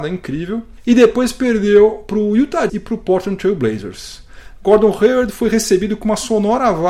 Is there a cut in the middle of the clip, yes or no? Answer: yes